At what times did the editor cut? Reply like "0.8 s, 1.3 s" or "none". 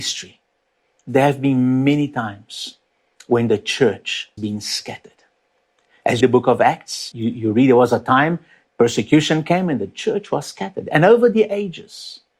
4.4 s, 6.2 s, 7.1 s